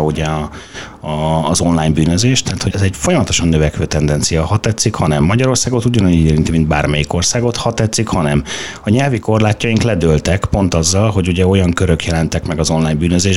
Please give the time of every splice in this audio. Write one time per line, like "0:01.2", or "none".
0:02.7